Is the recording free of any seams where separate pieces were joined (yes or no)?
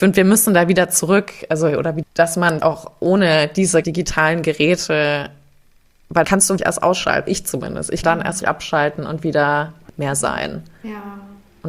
no